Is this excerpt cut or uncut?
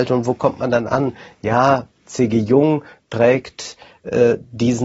uncut